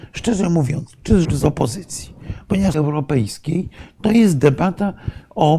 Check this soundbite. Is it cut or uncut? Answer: cut